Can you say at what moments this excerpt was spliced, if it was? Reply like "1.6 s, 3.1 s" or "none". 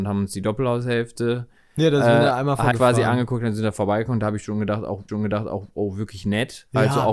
2.7 s, 5.1 s